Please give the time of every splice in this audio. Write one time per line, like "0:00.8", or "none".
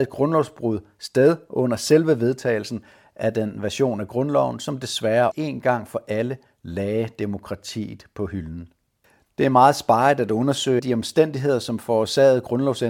0:05.3
0:09.0
0:10.8